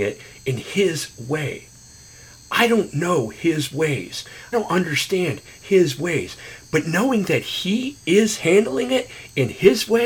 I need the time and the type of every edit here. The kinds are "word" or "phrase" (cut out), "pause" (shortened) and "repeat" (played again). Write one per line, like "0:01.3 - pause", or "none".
0:04.5 - word